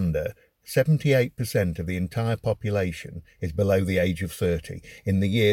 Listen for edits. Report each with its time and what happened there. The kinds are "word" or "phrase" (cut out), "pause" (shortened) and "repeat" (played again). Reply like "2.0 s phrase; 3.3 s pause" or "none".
none